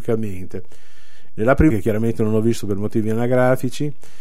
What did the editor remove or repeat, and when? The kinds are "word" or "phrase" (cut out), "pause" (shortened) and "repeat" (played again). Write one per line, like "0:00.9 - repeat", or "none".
0:01.7 - word